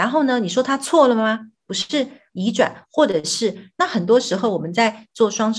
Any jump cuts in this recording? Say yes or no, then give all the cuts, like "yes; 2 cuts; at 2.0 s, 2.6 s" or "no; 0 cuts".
yes; 1 cut; at 2.3 s